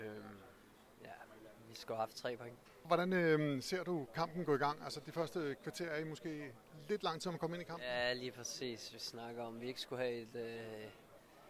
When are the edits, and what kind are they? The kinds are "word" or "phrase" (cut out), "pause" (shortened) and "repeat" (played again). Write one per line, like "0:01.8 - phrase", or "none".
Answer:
none